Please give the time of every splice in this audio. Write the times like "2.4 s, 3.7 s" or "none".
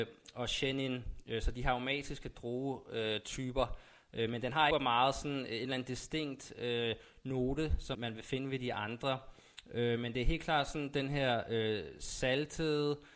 4.7 s, 7.9 s